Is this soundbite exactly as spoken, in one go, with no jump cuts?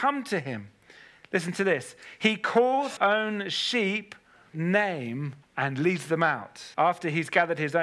no; 4 cuts; at 3.0 s, 4.5 s, 5.4 s, 6.7 s

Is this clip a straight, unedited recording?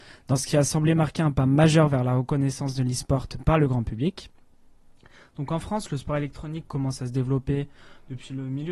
yes; 0 cuts

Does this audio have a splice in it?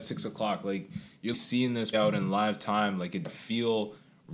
yes; 3 cuts; at 1.3 s, 1.9 s, 3.2 s

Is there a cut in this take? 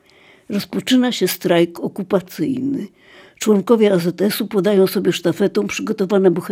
no; 0 cuts

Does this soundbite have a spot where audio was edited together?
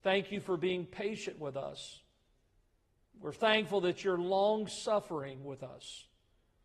no; 0 cuts

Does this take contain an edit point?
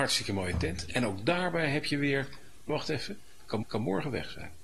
yes; 2 cuts; at 2.7 s, 3.6 s

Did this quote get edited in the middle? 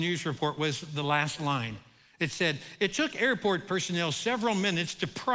no; 0 cuts

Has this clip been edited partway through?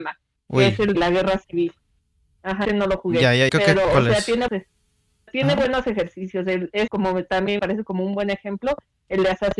yes; 8 cuts; at 0.9 s, 2.6 s, 3.5 s, 3.8 s, 4.5 s, 5.3 s, 6.9 s, 7.6 s

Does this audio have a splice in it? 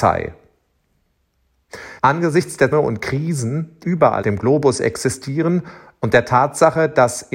yes; 4 cuts; at 2.0 s, 2.7 s, 3.8 s, 4.2 s

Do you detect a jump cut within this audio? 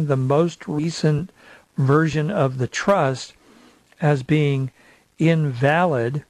no; 0 cuts

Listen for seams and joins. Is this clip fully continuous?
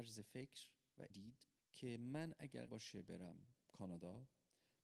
no; 3 cuts; at 1.1 s, 1.6 s, 2.7 s

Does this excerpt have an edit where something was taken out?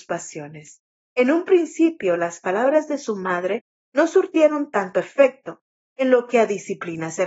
no; 0 cuts

